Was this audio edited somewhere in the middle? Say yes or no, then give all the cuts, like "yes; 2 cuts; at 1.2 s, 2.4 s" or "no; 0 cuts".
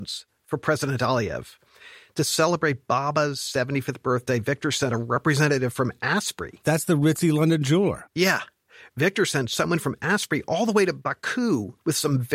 no; 0 cuts